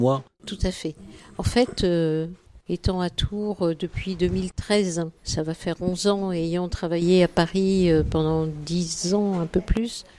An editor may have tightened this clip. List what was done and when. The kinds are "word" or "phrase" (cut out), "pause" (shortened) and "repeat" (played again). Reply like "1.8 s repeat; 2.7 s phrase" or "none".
5.2 s pause